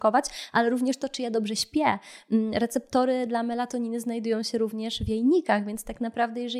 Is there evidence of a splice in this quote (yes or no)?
no